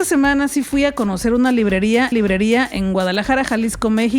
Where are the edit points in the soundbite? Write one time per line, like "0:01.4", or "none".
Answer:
0:02.1

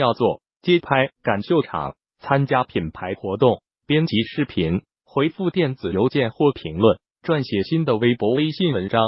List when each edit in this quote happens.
0:01.1

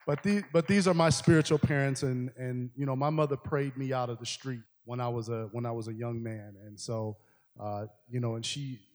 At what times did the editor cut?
0:04.7

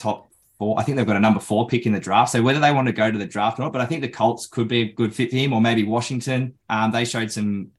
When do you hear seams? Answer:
0:06.6

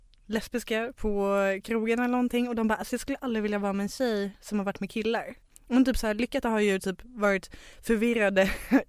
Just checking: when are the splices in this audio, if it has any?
0:05.4
0:06.4

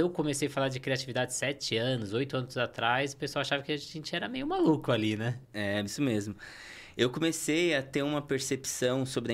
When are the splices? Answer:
0:05.9

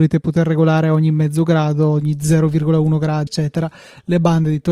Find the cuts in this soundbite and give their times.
0:03.3

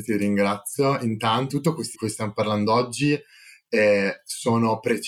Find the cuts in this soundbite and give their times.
0:01.5
0:01.9

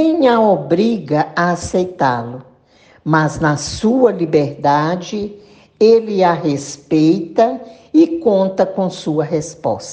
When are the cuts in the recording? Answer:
none

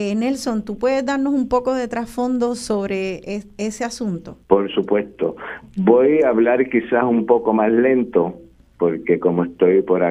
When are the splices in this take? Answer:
0:04.4

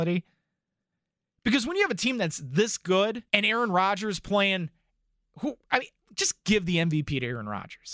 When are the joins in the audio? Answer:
0:03.3
0:05.6

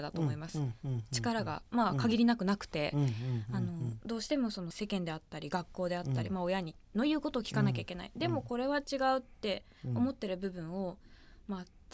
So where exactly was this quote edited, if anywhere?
0:09.3

